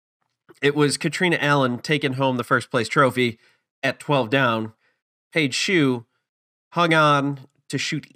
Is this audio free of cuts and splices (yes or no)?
yes